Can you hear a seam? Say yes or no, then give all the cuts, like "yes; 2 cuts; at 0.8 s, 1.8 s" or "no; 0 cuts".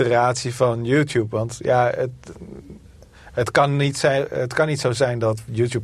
no; 0 cuts